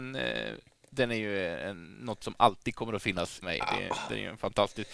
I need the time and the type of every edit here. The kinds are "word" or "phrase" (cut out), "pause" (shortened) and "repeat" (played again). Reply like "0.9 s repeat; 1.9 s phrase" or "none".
3.4 s word